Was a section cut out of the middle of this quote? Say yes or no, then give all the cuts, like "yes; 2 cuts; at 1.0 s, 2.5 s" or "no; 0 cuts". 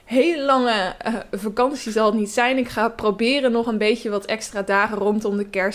no; 0 cuts